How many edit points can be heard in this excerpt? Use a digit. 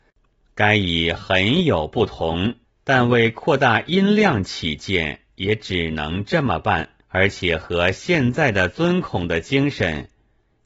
2